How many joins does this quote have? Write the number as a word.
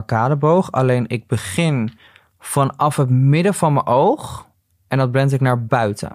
one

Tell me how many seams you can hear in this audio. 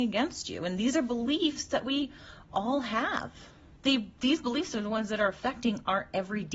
zero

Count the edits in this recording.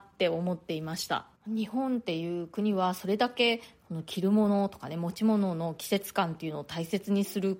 one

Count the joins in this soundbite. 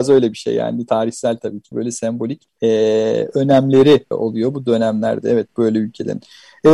three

